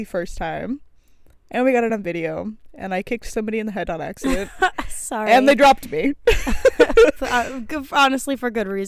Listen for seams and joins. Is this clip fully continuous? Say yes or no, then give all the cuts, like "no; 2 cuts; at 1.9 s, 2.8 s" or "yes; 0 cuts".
yes; 0 cuts